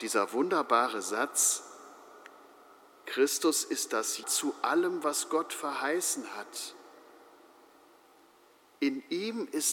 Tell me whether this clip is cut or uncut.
cut